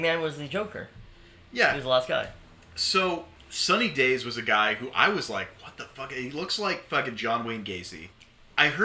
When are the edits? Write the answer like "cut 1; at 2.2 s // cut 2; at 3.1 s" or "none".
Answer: none